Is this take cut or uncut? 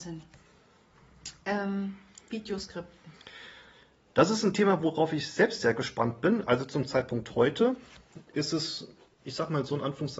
cut